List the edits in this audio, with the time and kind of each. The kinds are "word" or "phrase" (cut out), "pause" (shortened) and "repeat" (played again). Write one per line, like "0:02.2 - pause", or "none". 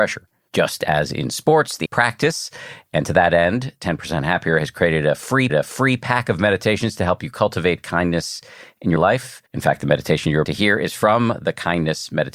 0:01.9 - phrase
0:05.5 - repeat
0:09.0 - word
0:09.5 - pause
0:10.4 - word